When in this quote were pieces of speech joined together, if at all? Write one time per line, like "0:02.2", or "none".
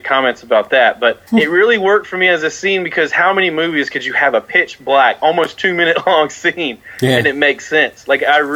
0:01.3